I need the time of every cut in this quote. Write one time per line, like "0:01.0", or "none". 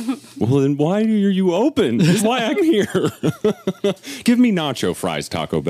0:02.2
0:02.6
0:04.2